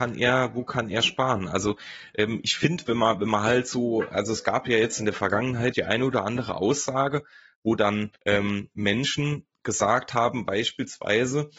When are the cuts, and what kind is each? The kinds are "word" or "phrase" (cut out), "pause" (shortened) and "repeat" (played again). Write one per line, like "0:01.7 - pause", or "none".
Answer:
0:05.7 - word
0:08.2 - pause